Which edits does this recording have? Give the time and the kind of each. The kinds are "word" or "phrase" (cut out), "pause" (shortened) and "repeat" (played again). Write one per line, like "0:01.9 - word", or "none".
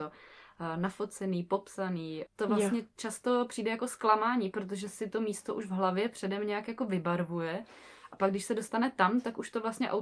0:02.3 - phrase